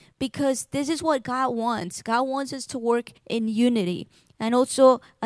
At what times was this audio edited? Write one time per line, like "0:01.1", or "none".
0:03.2